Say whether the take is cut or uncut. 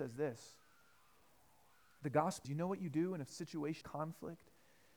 cut